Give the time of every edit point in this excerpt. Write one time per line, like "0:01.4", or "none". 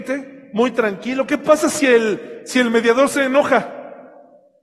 none